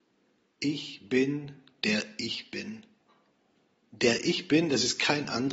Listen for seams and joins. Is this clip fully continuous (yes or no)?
yes